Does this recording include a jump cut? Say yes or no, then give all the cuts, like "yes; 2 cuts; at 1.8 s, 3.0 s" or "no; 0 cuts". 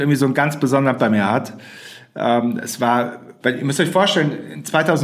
yes; 2 cuts; at 1.0 s, 3.4 s